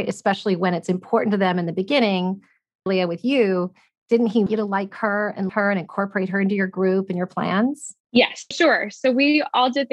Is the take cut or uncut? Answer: cut